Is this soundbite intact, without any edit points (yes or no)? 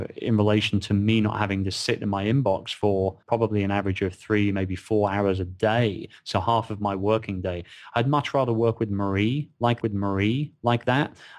no